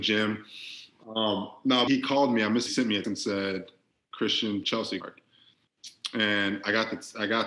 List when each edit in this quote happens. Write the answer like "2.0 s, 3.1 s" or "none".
1.9 s, 2.7 s, 3.0 s, 4.6 s, 5.0 s